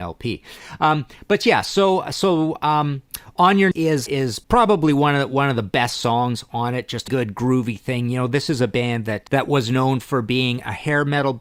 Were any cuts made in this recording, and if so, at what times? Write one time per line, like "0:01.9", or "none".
0:03.7
0:04.1
0:04.4
0:07.1
0:09.3